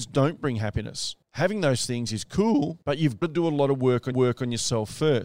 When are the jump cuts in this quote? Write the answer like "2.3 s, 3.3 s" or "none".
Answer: 1.2 s, 2.8 s, 3.2 s, 4.1 s